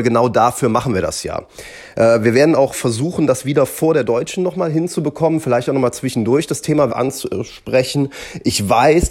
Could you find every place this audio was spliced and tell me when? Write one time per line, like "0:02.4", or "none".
0:06.9